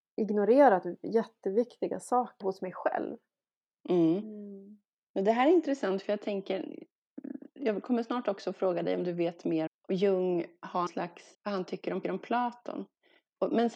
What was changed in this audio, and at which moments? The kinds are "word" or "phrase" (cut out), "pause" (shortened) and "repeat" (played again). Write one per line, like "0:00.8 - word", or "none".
0:02.4 - word
0:04.9 - pause
0:09.7 - word
0:10.9 - word
0:11.3 - word
0:12.0 - repeat